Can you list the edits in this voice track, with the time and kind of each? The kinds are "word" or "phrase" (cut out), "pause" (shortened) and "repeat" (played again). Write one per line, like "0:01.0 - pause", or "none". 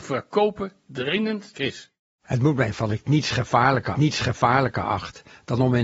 0:01.5 - word
0:02.1 - pause
0:02.9 - phrase
0:03.9 - repeat

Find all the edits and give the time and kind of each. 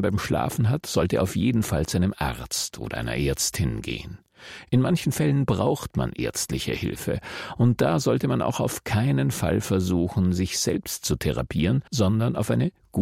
0:11.9 - pause

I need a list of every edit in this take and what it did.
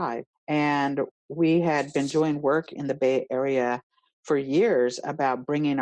none

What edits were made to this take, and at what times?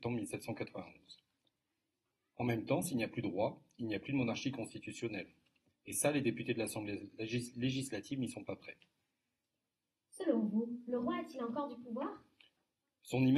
none

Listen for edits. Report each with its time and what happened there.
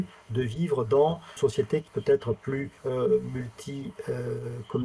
0:01.4 - word
0:01.9 - word
0:02.8 - pause

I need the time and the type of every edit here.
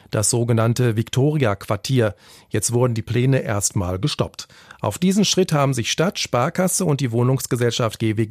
none

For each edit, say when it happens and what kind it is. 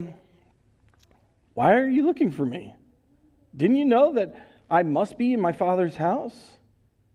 none

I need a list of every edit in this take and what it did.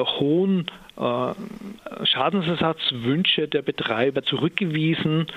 0:04.2 - phrase

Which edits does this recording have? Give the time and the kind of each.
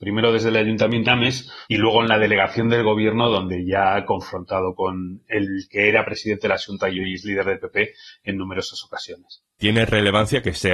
0:01.1 - word

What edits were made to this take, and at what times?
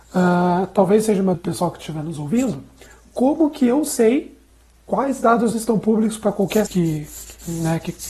0:01.3 - word
0:05.5 - word
0:06.7 - word

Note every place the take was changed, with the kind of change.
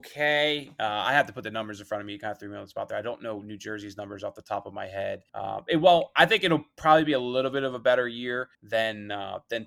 0:05.3 - pause
0:08.5 - pause

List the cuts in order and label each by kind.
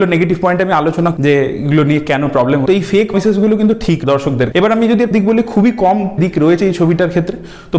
0:01.2 - word
0:02.7 - word
0:03.1 - word
0:04.0 - word
0:04.5 - word
0:05.1 - word
0:06.2 - word

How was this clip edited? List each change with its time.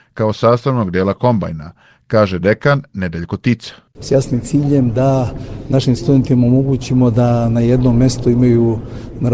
none

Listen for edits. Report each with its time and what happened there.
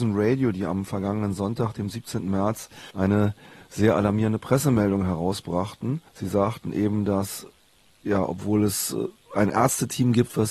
0:02.9 - pause
0:06.1 - pause

